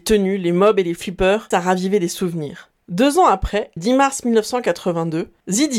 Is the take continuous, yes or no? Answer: no